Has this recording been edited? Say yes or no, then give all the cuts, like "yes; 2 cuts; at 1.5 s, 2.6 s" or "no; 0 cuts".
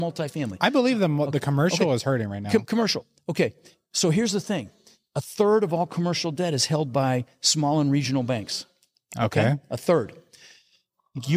no; 0 cuts